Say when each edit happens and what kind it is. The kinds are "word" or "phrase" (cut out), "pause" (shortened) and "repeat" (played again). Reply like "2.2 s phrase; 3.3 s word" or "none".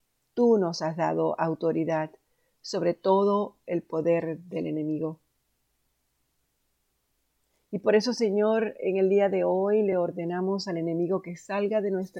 none